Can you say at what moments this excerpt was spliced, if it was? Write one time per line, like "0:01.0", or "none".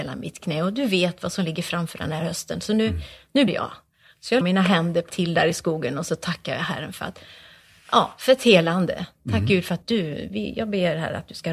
0:03.5
0:04.4
0:05.1
0:09.8